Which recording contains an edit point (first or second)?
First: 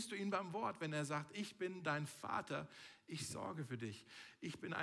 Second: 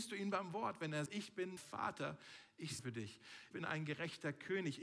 second